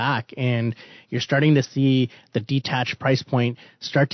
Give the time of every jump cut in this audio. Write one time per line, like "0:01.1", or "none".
none